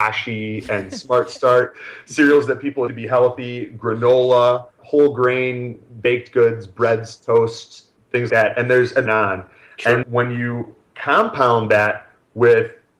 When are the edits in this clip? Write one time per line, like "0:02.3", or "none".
0:02.9
0:04.8
0:08.3
0:09.1
0:10.0